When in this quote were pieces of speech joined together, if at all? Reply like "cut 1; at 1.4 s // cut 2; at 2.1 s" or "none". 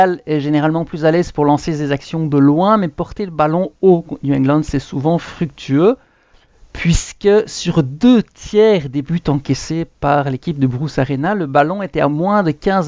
none